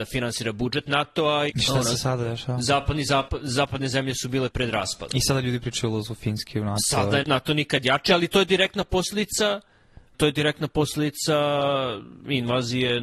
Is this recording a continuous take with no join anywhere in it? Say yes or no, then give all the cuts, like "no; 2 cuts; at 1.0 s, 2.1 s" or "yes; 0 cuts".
no; 4 cuts; at 1.5 s, 4.5 s, 7.2 s, 10.1 s